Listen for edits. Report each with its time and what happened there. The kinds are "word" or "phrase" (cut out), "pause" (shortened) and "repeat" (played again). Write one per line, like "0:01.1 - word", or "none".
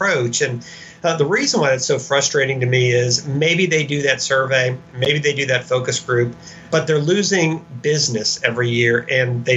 0:06.7 - word